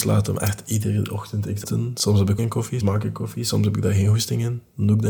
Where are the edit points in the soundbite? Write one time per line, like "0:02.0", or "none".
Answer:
0:01.6
0:02.4
0:02.8